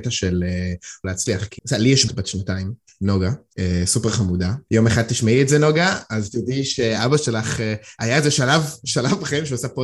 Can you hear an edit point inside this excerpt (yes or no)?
yes